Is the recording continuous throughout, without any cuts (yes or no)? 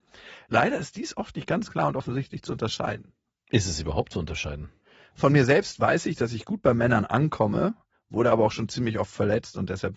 yes